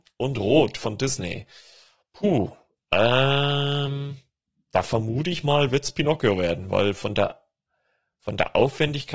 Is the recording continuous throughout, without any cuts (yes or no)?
yes